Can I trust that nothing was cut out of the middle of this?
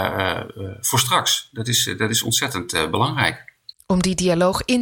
yes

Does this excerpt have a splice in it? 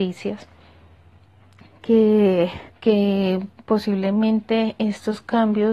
yes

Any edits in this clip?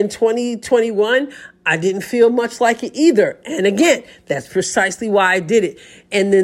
no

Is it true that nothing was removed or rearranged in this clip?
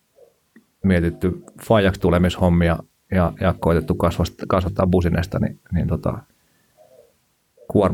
yes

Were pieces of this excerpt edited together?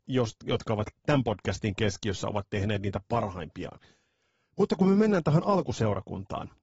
no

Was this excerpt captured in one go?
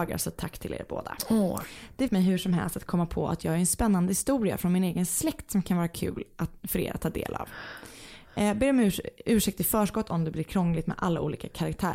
no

